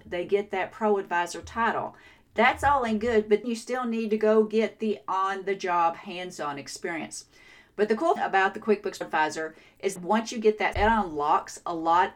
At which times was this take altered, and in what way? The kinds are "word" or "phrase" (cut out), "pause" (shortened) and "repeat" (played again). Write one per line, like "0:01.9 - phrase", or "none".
0:03.4 - word
0:08.2 - word
0:09.0 - word
0:10.0 - word
0:10.7 - word